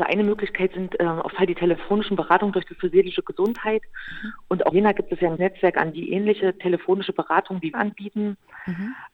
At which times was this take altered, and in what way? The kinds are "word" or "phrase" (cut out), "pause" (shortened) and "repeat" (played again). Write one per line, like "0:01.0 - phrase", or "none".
0:01.3 - word
0:02.8 - word
0:04.7 - word
0:05.4 - word
0:05.9 - word
0:07.7 - word